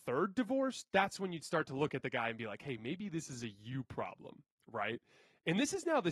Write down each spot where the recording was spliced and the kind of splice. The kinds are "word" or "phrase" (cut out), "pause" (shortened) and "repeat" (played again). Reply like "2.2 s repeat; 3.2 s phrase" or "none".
none